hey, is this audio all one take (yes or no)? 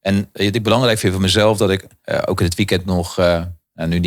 yes